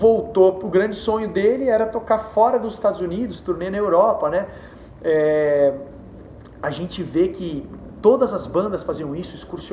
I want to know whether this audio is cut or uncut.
uncut